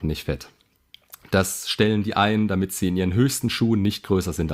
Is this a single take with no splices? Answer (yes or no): yes